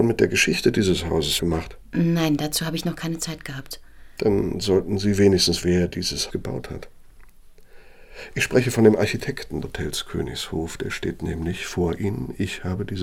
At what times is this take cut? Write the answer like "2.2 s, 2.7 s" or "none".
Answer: 1.4 s, 5.6 s, 6.3 s, 9.6 s